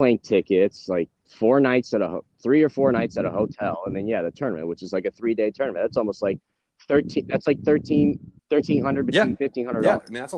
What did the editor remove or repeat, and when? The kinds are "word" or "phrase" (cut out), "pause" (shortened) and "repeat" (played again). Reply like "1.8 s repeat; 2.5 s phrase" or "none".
8.4 s pause